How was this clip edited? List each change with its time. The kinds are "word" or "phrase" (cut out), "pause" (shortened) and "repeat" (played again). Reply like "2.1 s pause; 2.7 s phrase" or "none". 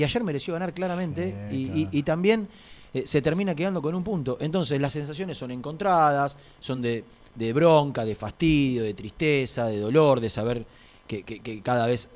none